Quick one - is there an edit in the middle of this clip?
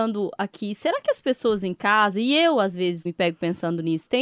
yes; 1 cut; at 3.1 s

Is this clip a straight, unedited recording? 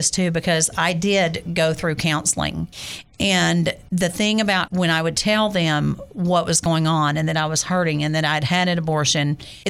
no; 1 cut; at 4.7 s

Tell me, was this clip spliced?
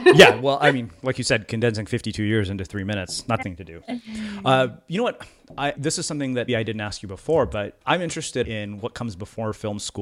yes; 5 cuts; at 3.4 s, 5.7 s, 6.5 s, 7.8 s, 8.4 s

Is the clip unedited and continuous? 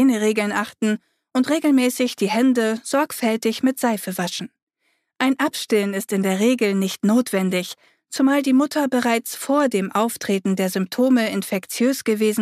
yes; 0 cuts

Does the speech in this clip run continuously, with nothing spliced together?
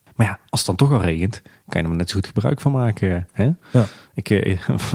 yes; 0 cuts

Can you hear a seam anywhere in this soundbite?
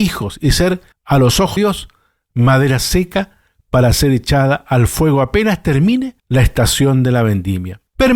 yes; 3 cuts; at 0.9 s, 1.6 s, 6.2 s

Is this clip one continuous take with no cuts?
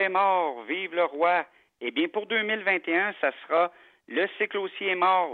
yes; 0 cuts

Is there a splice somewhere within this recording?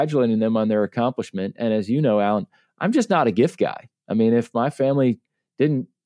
no; 0 cuts

